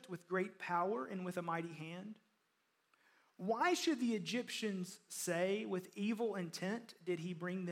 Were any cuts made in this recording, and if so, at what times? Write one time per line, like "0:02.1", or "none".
none